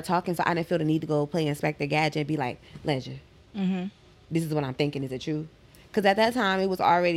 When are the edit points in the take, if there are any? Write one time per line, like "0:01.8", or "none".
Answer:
none